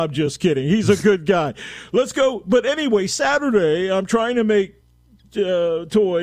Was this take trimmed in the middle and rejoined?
no; 0 cuts

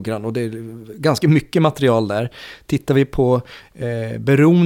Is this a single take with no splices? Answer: no; 1 cut; at 1.2 s

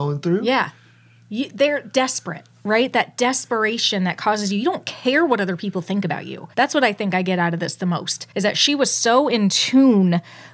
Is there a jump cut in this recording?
yes; 2 cuts; at 6.5 s, 8.3 s

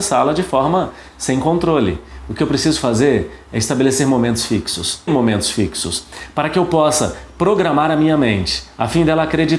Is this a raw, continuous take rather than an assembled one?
no; 1 cut; at 5.1 s

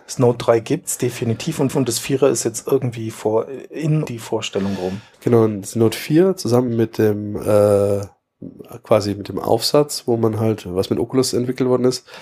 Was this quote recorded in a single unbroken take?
no; 3 cuts; at 1.7 s, 4.1 s, 6.7 s

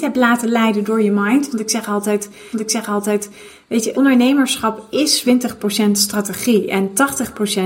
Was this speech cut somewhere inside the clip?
yes; 3 cuts; at 2.5 s, 3.9 s, 5.2 s

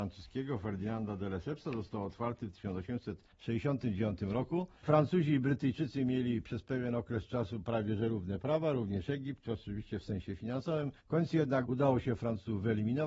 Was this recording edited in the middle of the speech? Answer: yes; 3 cuts; at 4.8 s, 11.0 s, 11.6 s

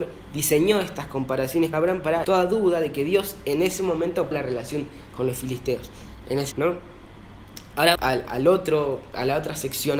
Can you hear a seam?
yes; 6 cuts; at 1.7 s, 2.2 s, 4.3 s, 5.1 s, 6.5 s, 7.9 s

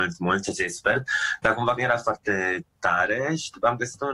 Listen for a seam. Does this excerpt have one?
yes; 1 cut; at 1.8 s

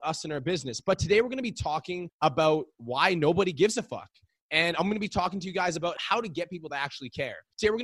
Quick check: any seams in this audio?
no; 0 cuts

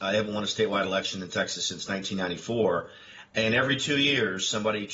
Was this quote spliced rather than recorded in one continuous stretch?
no; 0 cuts

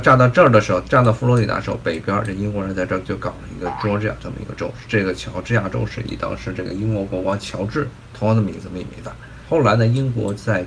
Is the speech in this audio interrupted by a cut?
no; 0 cuts

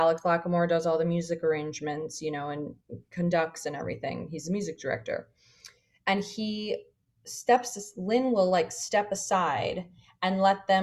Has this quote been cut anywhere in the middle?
no; 0 cuts

